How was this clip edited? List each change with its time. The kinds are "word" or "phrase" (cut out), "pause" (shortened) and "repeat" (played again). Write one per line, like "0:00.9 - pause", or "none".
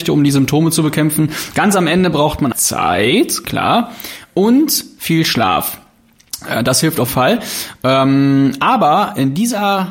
0:02.5 - word
0:07.1 - word